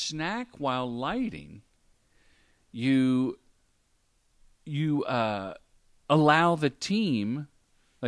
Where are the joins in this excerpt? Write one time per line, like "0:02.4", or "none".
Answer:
none